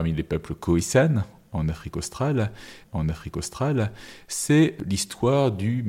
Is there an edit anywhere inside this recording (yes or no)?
yes